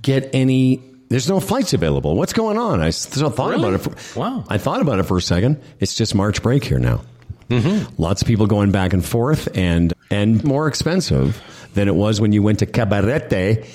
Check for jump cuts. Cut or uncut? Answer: cut